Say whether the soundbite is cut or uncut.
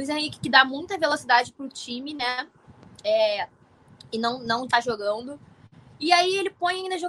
uncut